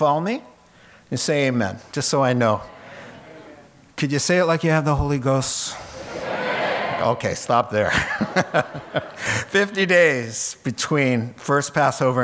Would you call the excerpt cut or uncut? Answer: uncut